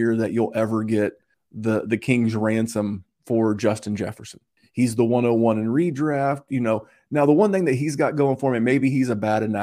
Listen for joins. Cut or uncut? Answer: uncut